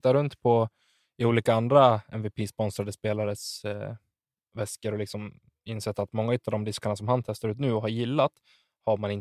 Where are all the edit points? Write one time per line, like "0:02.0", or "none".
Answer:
none